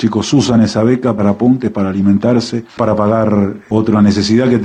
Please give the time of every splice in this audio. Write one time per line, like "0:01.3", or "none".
0:01.2
0:01.7
0:02.7